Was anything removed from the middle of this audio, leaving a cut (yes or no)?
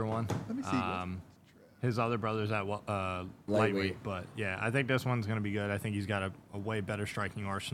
no